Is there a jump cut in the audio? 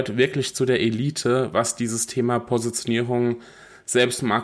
no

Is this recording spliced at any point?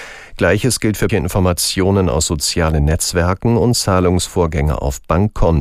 yes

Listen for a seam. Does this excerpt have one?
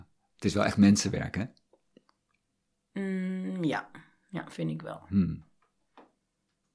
no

